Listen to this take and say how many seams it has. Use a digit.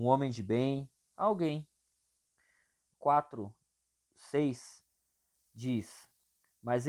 1